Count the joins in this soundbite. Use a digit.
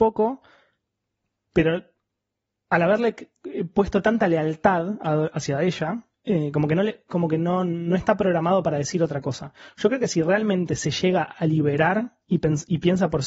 0